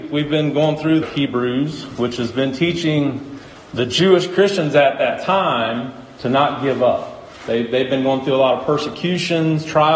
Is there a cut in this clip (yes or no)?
yes